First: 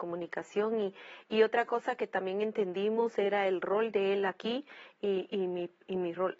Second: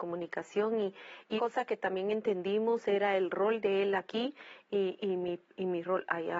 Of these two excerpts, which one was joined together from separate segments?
second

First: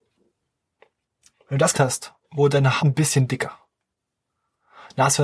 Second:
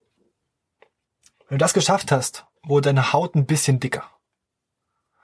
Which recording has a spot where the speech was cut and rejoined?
first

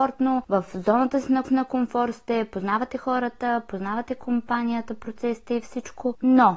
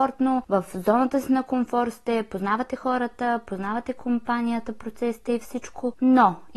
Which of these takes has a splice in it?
first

